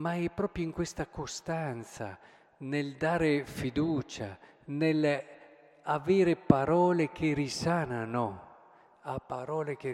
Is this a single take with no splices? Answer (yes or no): yes